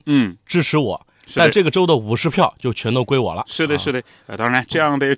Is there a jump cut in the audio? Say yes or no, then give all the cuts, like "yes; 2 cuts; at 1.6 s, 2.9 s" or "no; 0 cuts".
no; 0 cuts